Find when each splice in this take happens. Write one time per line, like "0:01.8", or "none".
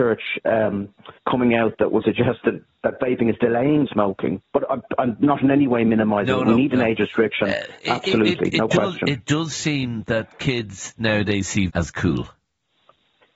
0:01.2
0:02.0
0:03.9
0:11.7